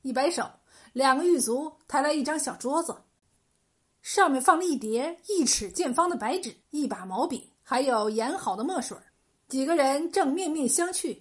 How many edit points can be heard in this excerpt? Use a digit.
3